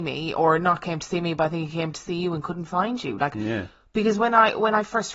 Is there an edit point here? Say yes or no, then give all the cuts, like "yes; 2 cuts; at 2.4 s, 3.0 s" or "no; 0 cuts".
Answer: no; 0 cuts